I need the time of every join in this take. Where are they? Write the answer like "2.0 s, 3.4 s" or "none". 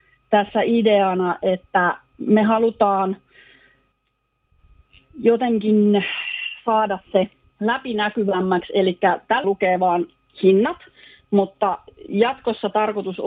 9.4 s

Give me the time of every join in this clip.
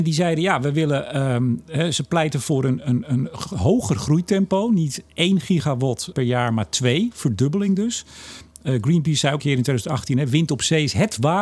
6.1 s, 9.4 s

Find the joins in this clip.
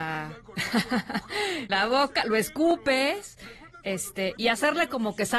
1.7 s, 4.4 s

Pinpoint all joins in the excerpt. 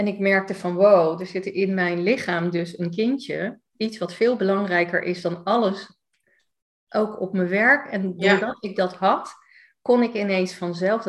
none

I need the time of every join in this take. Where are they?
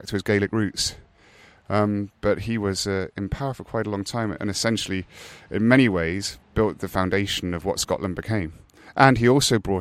none

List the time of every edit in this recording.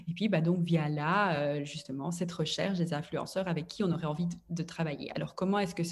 none

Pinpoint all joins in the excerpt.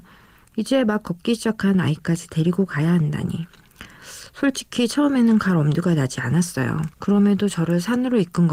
6.9 s

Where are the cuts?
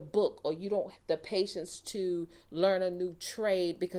0.9 s

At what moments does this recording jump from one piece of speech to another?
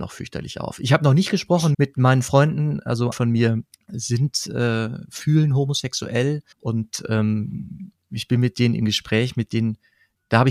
1.7 s, 3.1 s, 3.7 s, 6.5 s

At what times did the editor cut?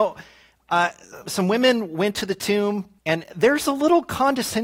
1.2 s, 3.0 s

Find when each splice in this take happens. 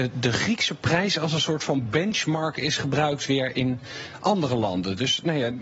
none

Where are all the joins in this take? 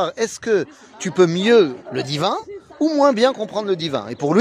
1.9 s

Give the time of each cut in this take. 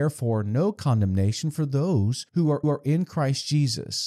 2.3 s, 2.6 s

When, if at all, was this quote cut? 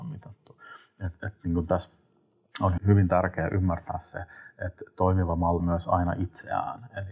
2.8 s, 5.6 s

